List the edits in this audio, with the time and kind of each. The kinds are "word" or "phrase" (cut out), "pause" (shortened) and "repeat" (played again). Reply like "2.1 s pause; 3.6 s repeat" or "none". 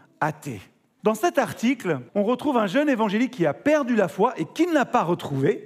1.0 s word; 2.1 s pause